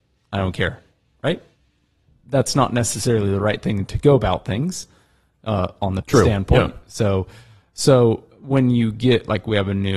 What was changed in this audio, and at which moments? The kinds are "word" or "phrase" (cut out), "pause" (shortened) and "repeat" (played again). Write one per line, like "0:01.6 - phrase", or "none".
0:06.0 - word
0:08.3 - pause